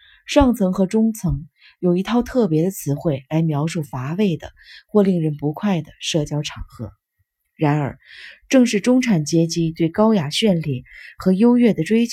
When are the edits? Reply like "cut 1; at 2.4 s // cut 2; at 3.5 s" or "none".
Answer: none

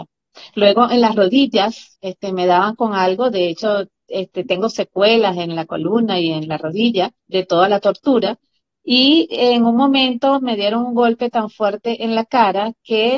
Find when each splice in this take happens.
cut 1; at 7.2 s

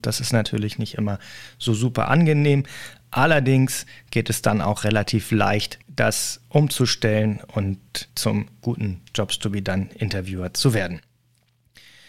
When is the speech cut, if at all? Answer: cut 1; at 5.8 s // cut 2; at 8.1 s // cut 3; at 9.1 s

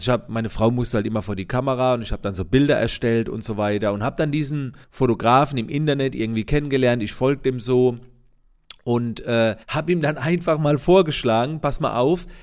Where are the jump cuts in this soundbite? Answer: cut 1; at 4.8 s // cut 2; at 9.6 s

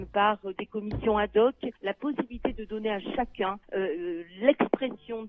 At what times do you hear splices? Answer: cut 1; at 1.8 s // cut 2; at 3.6 s

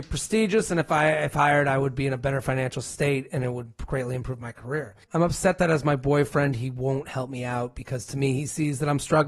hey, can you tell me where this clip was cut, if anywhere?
cut 1; at 5.0 s

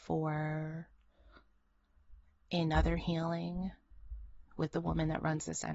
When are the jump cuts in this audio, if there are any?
none

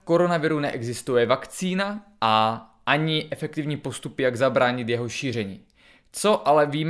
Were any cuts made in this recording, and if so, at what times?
none

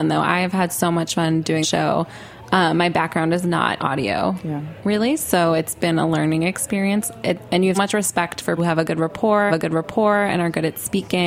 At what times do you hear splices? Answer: cut 1; at 1.6 s // cut 2; at 3.8 s // cut 3; at 7.7 s // cut 4; at 8.6 s // cut 5; at 9.5 s

